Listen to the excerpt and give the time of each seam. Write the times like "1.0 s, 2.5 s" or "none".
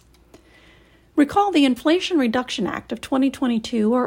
none